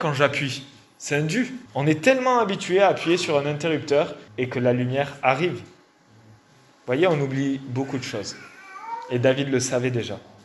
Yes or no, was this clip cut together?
yes